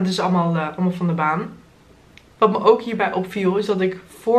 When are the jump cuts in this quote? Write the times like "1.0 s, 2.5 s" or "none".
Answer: none